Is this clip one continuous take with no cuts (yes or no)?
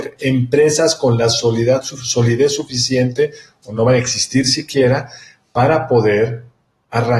yes